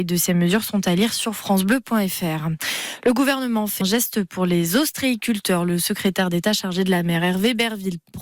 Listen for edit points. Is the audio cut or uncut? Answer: cut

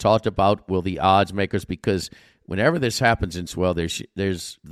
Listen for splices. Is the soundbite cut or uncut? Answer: cut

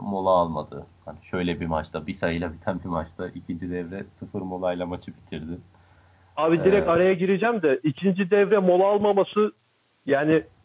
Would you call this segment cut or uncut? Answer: uncut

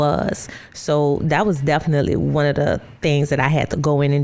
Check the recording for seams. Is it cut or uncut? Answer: cut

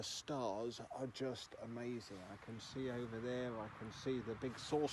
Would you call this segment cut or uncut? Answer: uncut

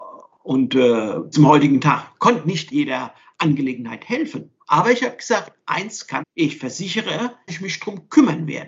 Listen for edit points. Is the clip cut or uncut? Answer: cut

